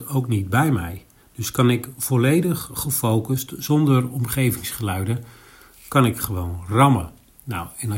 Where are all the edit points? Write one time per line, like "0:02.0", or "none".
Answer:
0:01.2